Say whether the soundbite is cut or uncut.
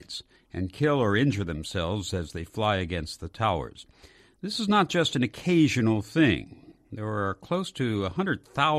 uncut